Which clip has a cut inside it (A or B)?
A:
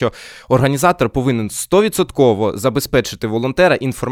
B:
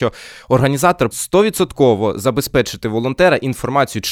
B